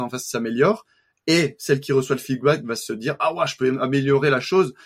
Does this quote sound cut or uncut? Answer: uncut